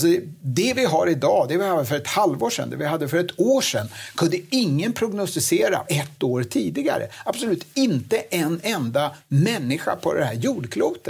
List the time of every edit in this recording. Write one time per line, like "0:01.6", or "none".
0:05.8